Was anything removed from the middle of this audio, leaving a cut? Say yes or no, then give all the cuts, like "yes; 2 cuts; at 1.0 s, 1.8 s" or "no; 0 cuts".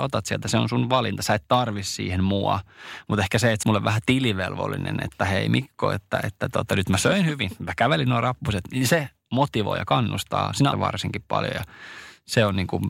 yes; 2 cuts; at 3.6 s, 10.7 s